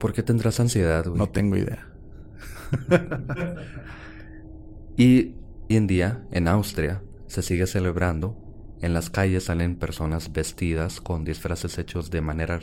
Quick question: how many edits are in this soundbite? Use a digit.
1